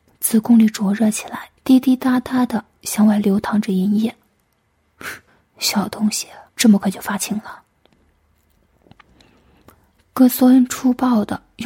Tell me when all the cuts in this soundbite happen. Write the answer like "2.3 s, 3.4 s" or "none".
1.6 s, 5.3 s, 6.5 s